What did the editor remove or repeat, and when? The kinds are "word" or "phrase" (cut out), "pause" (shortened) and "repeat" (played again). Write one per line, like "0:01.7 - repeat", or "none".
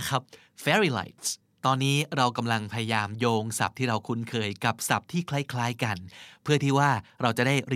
0:01.4 - pause